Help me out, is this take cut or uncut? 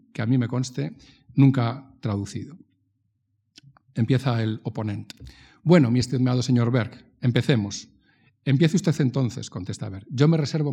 uncut